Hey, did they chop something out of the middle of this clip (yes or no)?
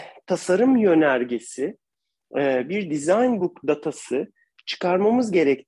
no